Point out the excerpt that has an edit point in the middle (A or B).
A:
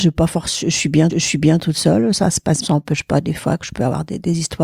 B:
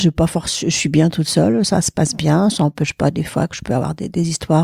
A